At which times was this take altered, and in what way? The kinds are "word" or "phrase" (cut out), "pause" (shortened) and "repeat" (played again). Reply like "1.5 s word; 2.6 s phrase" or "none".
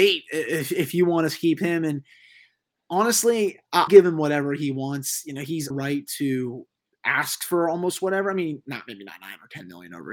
3.9 s word; 5.7 s phrase; 6.8 s pause